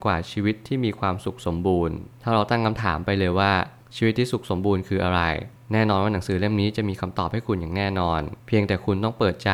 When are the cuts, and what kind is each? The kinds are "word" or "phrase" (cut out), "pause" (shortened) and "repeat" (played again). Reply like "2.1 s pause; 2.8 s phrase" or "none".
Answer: 8.4 s pause